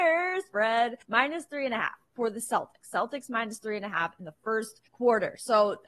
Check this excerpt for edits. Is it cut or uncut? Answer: cut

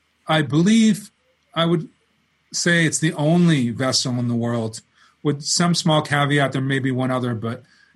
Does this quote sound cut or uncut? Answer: uncut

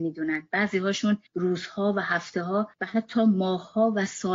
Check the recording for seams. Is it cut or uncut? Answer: cut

